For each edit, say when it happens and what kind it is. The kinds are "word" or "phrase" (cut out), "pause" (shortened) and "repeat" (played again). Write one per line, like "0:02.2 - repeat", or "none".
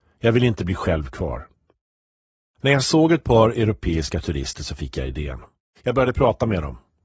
none